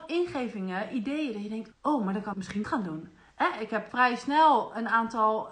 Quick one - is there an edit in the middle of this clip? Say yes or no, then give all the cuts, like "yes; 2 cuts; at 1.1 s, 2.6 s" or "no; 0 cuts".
yes; 4 cuts; at 1.7 s, 2.3 s, 2.6 s, 3.9 s